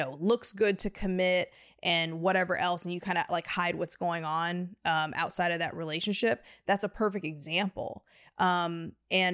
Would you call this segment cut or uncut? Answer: uncut